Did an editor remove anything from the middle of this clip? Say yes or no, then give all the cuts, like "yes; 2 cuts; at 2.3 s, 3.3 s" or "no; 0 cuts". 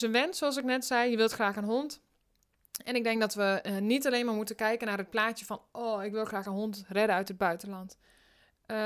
no; 0 cuts